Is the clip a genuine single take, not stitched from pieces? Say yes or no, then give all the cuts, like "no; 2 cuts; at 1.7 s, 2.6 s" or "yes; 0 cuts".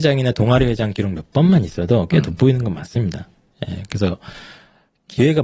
yes; 0 cuts